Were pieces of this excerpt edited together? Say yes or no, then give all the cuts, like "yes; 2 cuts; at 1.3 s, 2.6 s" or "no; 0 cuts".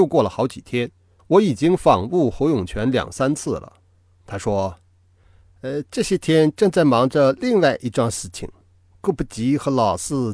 yes; 1 cut; at 1.2 s